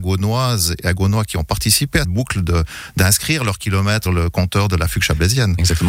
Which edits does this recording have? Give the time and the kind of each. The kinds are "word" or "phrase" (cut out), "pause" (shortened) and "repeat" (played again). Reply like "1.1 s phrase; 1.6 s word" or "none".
2.0 s word; 4.1 s word

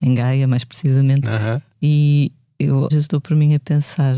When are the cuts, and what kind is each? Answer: 2.9 s word

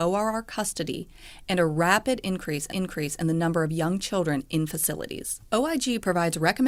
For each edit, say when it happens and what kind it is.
2.7 s repeat

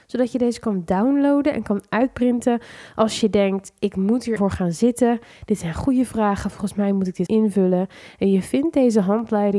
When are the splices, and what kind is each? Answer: 4.4 s word; 7.3 s word

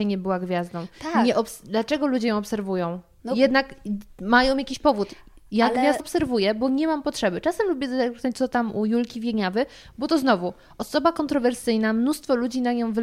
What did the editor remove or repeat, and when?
6.0 s word

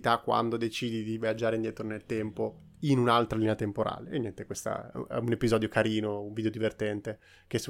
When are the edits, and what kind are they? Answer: none

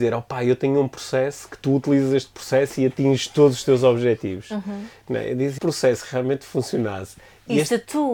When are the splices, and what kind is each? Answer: 5.6 s phrase

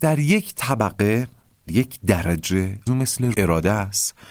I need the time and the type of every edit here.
1.7 s word; 2.9 s word; 3.3 s phrase

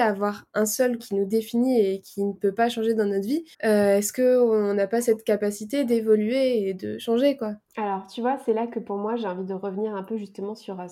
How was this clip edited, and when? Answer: 1.0 s word; 3.5 s pause; 7.6 s pause

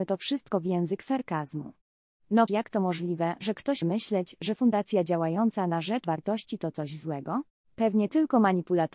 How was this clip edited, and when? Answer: 2.5 s word; 3.8 s word; 6.0 s word; 7.5 s pause

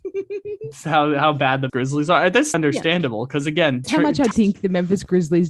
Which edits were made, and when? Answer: 1.7 s word; 2.5 s word; 3.8 s word; 4.3 s word

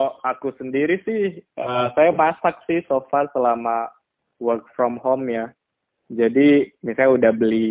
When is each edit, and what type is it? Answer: none

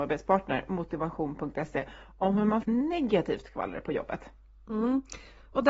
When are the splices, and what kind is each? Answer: 2.6 s word

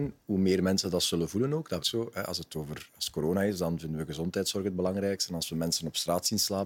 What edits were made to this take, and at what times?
1.8 s word

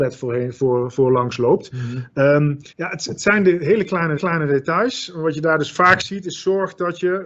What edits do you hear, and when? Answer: 2.7 s pause; 4.2 s repeat

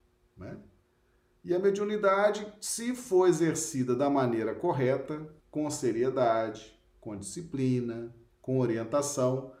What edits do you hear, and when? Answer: 5.4 s pause; 8.3 s pause

